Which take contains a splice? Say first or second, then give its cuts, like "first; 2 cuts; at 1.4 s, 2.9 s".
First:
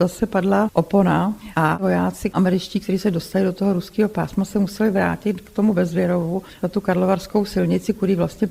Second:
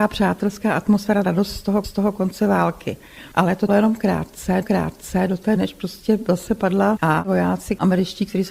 second; 6 cuts; at 1.2 s, 1.8 s, 3.7 s, 4.6 s, 5.6 s, 7.0 s